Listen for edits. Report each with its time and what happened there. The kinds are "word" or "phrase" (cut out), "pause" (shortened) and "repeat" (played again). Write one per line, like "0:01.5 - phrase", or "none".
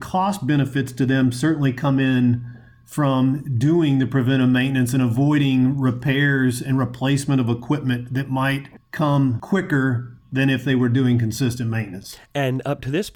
none

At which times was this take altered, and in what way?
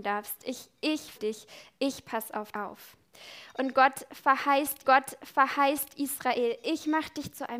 0:01.1 - word
0:02.5 - word
0:04.8 - repeat

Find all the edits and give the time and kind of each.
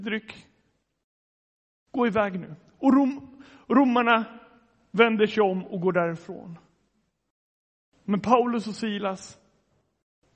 none

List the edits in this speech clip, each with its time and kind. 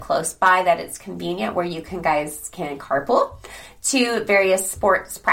none

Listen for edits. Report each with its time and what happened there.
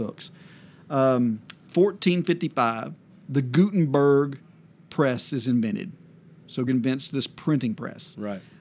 0:01.6 - word
0:06.7 - word

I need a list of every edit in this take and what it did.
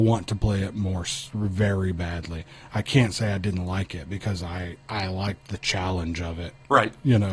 0:04.8 - pause

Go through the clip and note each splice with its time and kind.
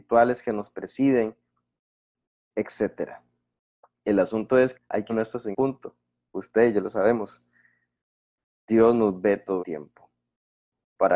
0:04.7 - word
0:05.1 - word
0:05.5 - word
0:09.6 - word

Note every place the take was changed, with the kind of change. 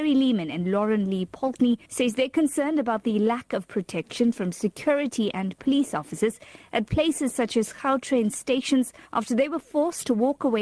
0:01.8 - pause
0:09.1 - pause

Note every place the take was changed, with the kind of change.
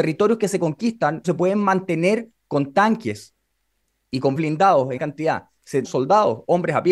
0:01.2 - word
0:04.4 - word
0:05.0 - word
0:05.8 - word

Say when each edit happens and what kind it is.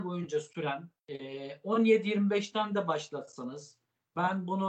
0:01.0 - pause

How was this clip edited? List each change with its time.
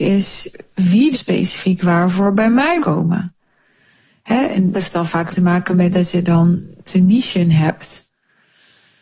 0:01.1 - word
0:02.8 - word
0:04.7 - word
0:05.3 - word
0:05.9 - word
0:06.9 - word

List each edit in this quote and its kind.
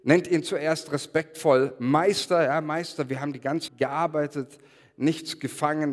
0:03.7 - word

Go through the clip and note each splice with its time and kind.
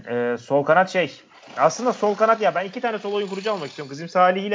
none

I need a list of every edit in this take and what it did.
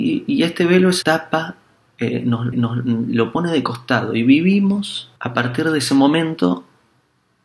0:01.0 - phrase
0:02.5 - repeat
0:05.2 - pause

